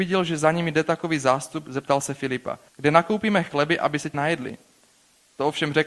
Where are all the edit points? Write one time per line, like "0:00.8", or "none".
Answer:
0:02.7
0:04.1